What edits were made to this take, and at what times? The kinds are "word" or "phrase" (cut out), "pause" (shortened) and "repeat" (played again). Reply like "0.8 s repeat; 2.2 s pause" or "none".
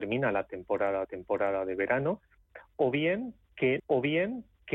1.0 s repeat; 3.8 s repeat